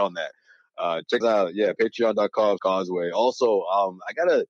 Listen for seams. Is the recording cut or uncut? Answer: cut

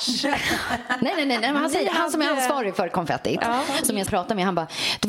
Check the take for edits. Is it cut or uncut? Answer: cut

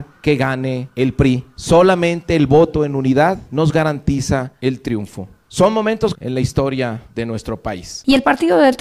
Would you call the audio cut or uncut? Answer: cut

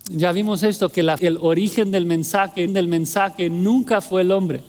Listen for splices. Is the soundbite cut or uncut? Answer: cut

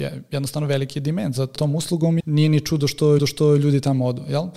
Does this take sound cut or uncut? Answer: cut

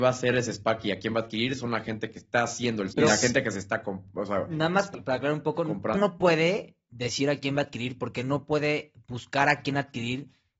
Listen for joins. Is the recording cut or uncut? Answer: cut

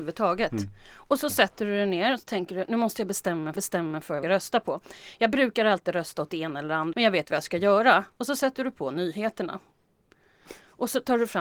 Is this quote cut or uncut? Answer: cut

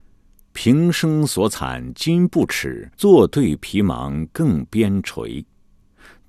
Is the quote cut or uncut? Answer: cut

